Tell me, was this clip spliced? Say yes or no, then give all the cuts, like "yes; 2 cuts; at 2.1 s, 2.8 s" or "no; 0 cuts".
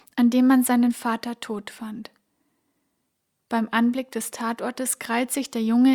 no; 0 cuts